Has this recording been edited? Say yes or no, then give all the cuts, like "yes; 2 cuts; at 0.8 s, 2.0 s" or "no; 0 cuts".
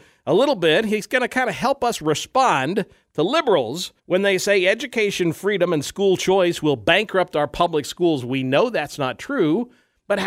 yes; 1 cut; at 4.0 s